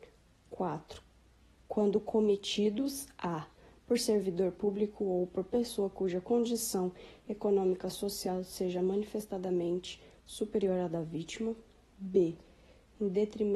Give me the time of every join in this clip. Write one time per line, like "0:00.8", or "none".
none

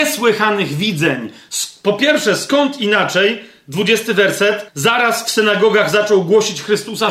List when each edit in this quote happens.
0:04.7

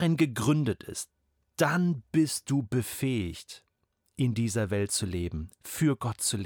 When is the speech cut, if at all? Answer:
none

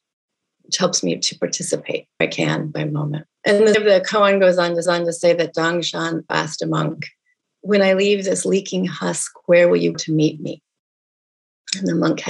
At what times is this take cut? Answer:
0:02.2
0:02.7
0:03.3
0:03.7
0:04.8
0:06.3
0:07.4
0:09.9

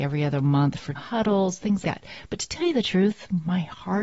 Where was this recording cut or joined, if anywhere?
0:00.9
0:01.8

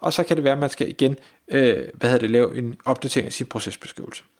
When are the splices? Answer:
none

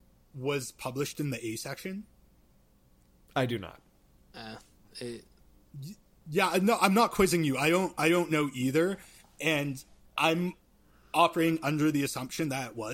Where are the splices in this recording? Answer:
none

